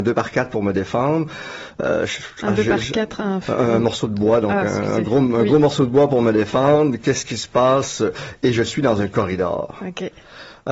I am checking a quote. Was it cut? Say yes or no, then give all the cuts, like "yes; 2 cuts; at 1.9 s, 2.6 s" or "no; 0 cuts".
no; 0 cuts